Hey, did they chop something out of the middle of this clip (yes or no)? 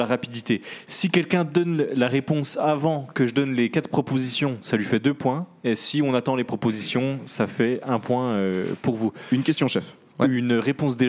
no